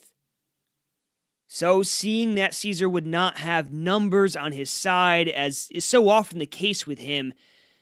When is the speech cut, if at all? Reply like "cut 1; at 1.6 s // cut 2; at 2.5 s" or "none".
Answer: none